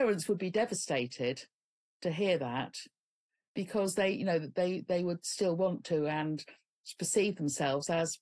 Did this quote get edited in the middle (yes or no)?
no